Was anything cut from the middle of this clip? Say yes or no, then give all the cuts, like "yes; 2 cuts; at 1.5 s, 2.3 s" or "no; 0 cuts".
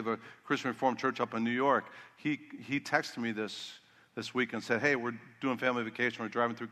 no; 0 cuts